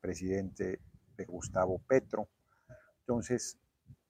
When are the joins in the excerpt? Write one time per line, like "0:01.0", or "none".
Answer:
0:01.3